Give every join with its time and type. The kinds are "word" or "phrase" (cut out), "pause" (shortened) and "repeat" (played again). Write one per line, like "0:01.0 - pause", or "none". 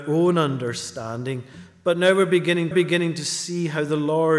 0:02.7 - repeat